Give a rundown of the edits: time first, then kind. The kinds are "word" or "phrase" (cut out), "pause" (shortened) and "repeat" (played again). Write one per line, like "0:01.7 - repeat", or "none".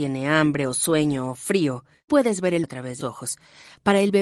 0:02.1 - word
0:02.6 - word
0:03.0 - word